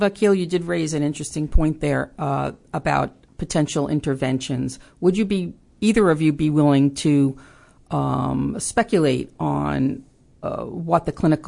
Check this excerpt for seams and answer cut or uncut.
uncut